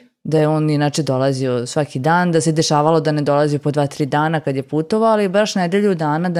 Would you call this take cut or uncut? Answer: uncut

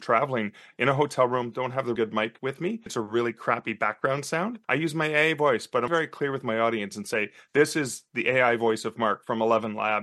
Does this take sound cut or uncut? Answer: cut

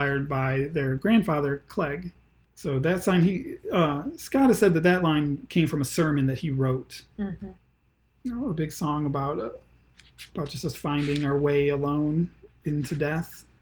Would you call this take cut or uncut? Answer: uncut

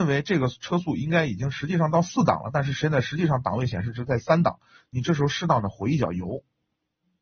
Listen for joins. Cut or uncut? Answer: uncut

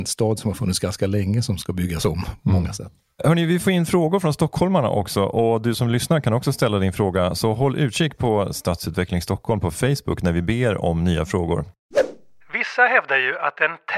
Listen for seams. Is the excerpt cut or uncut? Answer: uncut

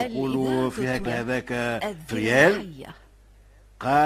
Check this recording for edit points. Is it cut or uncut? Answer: cut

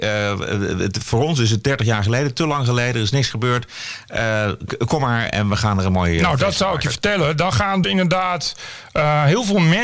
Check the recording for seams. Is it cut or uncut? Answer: cut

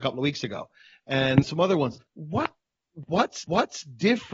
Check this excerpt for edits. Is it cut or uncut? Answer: cut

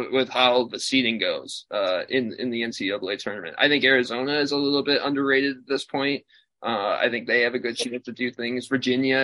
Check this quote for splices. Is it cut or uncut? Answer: uncut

